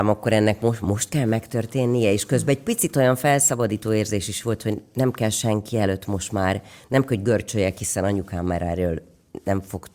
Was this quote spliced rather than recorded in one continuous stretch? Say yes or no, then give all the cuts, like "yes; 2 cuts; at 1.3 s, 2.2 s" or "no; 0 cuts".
no; 0 cuts